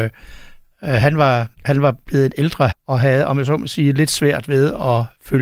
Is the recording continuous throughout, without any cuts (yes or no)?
no